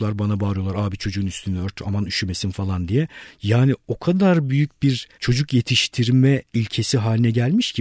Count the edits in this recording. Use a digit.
1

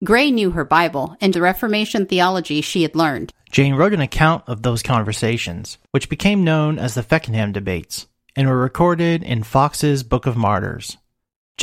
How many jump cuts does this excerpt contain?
2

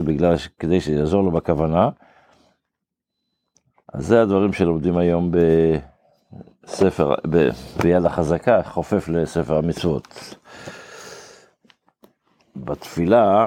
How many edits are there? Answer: 0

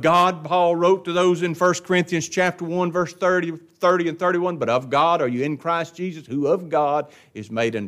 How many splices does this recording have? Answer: 0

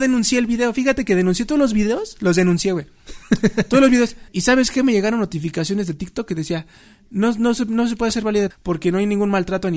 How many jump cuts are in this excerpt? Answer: 2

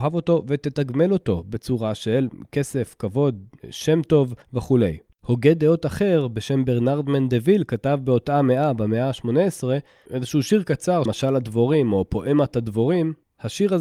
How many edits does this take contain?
2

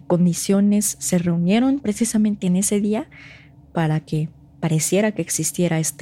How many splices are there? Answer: 0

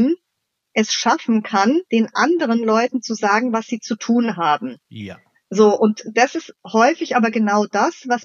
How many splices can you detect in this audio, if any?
2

